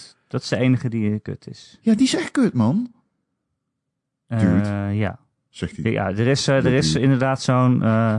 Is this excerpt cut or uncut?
uncut